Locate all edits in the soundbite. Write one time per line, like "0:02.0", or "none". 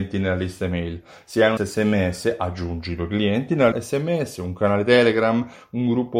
0:01.6
0:03.7